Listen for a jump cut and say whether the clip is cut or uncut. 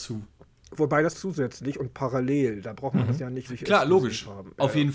cut